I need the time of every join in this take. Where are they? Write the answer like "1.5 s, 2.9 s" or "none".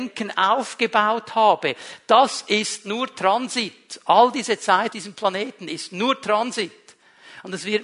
4.9 s